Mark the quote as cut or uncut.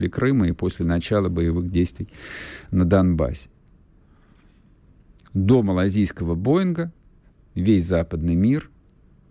uncut